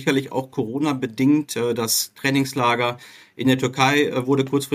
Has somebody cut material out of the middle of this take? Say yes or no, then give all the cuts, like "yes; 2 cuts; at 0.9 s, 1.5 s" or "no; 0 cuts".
no; 0 cuts